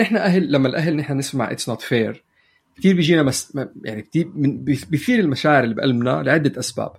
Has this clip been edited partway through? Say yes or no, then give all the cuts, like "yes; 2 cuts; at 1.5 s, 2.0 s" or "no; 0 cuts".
no; 0 cuts